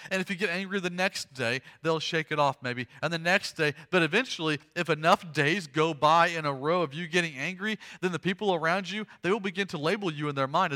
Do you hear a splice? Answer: no; 0 cuts

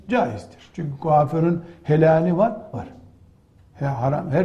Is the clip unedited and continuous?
no; 1 cut; at 2.7 s

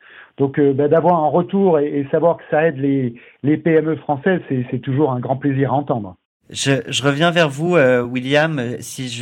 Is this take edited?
no; 0 cuts

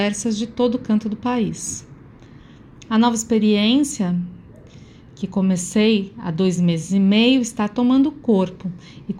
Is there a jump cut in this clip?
no; 0 cuts

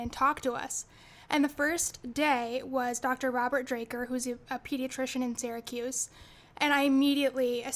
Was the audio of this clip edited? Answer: no; 0 cuts

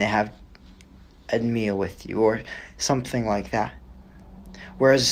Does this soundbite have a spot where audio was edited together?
no; 0 cuts

